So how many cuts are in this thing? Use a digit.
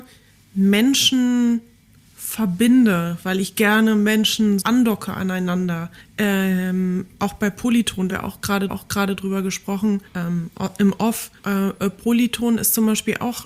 6